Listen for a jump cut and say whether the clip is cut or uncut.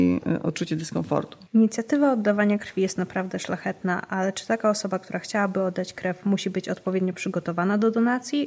cut